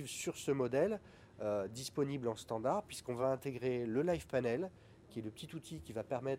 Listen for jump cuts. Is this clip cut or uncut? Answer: uncut